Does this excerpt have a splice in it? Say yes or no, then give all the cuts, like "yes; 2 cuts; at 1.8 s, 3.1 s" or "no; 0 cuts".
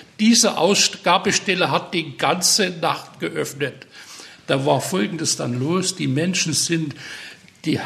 no; 0 cuts